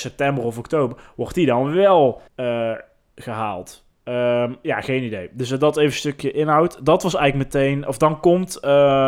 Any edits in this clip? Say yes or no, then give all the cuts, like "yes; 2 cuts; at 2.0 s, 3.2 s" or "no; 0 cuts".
yes; 1 cut; at 2.3 s